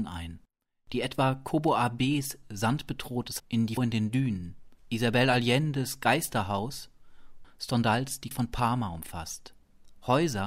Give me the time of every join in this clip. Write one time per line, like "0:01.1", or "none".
0:03.4
0:03.8
0:04.8
0:07.4
0:08.3